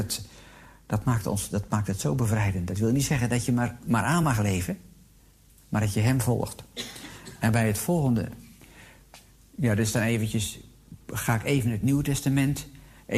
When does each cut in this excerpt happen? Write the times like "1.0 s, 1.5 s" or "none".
none